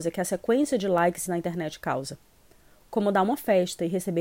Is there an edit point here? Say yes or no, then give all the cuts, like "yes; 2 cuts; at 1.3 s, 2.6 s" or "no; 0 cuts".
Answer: yes; 1 cut; at 1.3 s